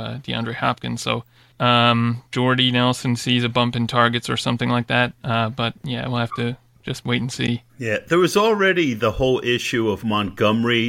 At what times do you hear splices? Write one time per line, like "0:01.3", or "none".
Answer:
0:01.5
0:02.3
0:07.7